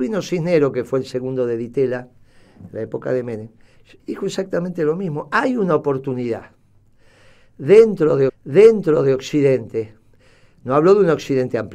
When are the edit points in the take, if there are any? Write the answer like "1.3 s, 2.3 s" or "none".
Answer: 4.0 s, 8.3 s

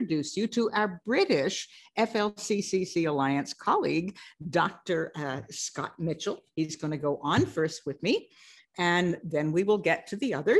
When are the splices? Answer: none

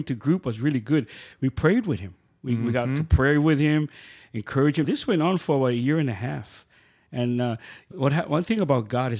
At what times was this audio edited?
4.8 s, 7.9 s

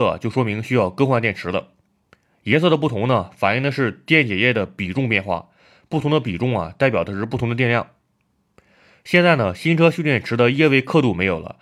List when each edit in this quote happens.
none

